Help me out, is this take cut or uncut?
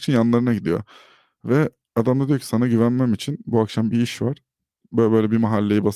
uncut